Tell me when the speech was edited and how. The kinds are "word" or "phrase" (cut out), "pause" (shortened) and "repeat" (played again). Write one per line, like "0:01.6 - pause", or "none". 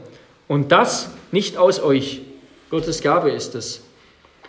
none

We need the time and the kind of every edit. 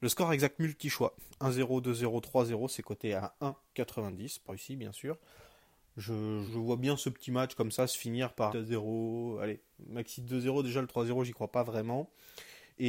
0:04.5 - word
0:06.5 - word
0:08.5 - phrase

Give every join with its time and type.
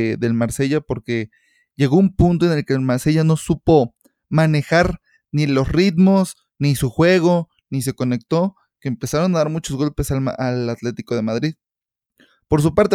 none

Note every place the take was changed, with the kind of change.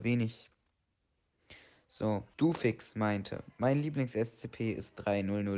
0:02.3 - pause

